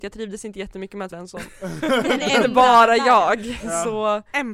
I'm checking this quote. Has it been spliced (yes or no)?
yes